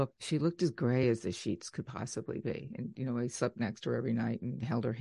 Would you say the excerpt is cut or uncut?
uncut